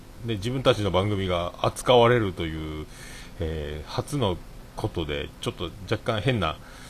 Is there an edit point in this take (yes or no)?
yes